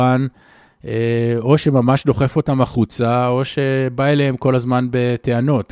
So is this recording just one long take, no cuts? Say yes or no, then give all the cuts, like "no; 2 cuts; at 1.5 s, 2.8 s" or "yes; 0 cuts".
yes; 0 cuts